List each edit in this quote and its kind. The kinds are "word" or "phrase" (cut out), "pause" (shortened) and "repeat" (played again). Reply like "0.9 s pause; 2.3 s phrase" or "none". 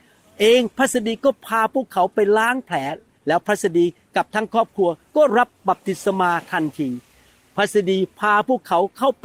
none